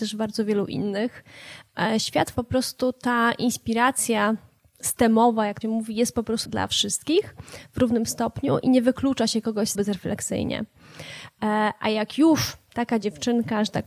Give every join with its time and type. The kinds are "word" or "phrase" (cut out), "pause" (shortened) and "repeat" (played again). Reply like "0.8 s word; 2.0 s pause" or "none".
2.3 s word; 5.6 s word; 6.4 s word; 9.7 s word